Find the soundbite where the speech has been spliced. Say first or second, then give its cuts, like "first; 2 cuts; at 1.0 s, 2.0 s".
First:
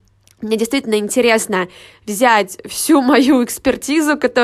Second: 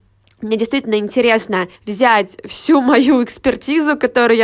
second; 1 cut; at 1.8 s